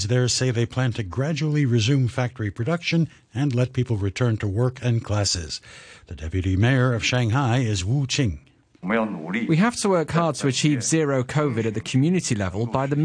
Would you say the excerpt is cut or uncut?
uncut